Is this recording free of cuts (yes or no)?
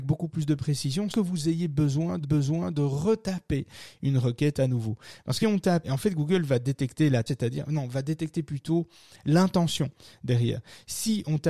no